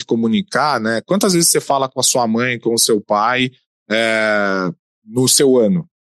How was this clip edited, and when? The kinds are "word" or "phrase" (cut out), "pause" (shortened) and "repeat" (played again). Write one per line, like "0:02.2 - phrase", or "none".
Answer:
none